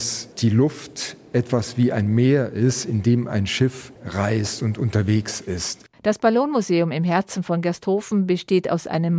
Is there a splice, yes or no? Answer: yes